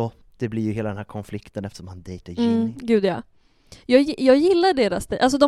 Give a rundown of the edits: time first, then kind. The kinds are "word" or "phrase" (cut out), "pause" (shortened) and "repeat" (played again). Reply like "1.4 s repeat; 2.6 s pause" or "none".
none